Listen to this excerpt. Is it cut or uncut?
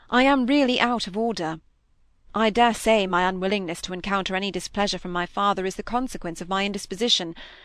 uncut